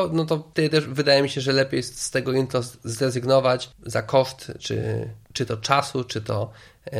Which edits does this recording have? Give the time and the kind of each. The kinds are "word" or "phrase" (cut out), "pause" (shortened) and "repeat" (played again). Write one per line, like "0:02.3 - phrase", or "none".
0:05.2 - pause